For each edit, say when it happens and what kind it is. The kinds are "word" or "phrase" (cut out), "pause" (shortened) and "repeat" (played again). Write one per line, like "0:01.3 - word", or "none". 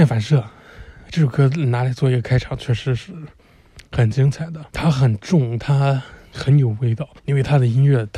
0:04.7 - pause
0:07.2 - pause

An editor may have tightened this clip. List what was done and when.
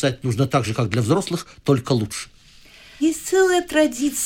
none

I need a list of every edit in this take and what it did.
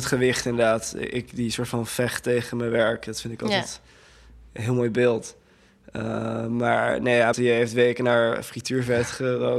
0:07.3 - word

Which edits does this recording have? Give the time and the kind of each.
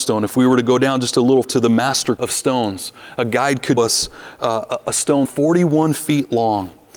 0:01.4 - word
0:02.2 - word
0:03.8 - word
0:05.2 - word

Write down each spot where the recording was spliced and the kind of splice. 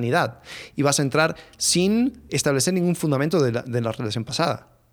0:02.3 - word

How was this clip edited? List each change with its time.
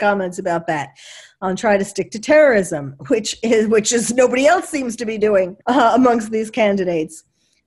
0:05.6 - pause

